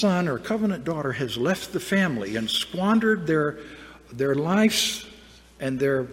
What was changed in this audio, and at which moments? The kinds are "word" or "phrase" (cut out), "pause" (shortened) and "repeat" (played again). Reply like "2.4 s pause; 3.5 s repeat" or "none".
none